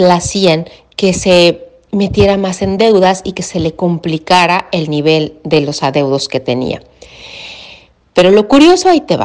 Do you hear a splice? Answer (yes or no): no